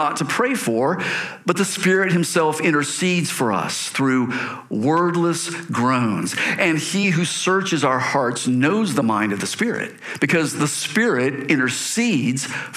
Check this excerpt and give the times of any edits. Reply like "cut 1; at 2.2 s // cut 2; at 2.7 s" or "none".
none